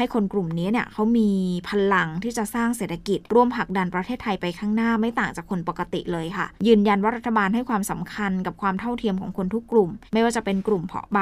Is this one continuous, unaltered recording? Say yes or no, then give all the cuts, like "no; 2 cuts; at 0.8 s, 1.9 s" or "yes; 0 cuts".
no; 3 cuts; at 3.3 s, 6.6 s, 10.1 s